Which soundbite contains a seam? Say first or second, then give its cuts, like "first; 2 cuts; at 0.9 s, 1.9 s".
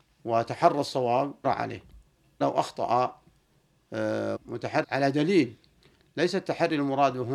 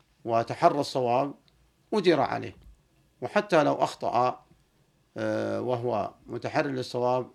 first; 4 cuts; at 1.4 s, 2.4 s, 4.4 s, 4.8 s